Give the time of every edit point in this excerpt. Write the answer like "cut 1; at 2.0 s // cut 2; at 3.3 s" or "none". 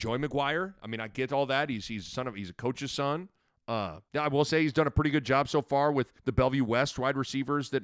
cut 1; at 4.1 s // cut 2; at 6.2 s